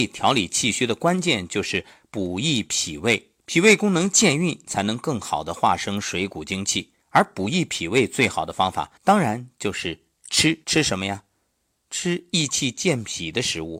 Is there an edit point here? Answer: yes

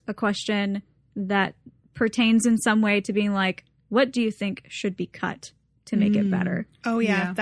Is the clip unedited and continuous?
yes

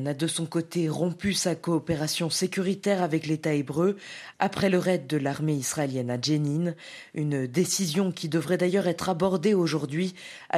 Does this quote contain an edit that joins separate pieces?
no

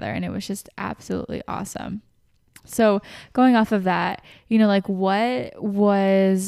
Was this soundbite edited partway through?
no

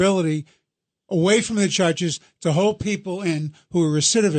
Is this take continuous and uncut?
yes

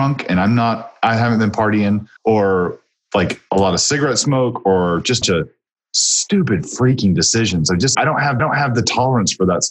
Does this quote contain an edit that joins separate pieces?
yes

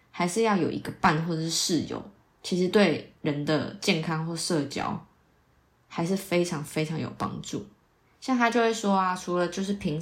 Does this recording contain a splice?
no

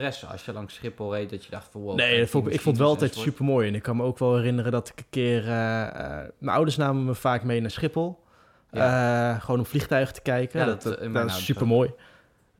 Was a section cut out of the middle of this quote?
no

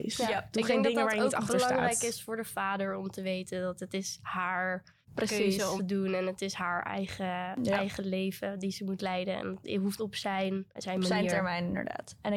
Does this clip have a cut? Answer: yes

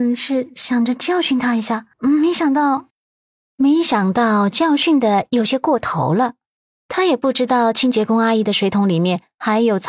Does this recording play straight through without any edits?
no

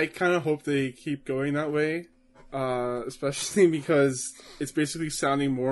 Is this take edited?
no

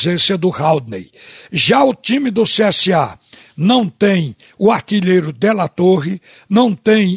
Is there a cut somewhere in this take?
no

